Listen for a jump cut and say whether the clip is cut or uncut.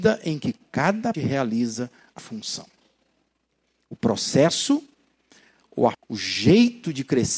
cut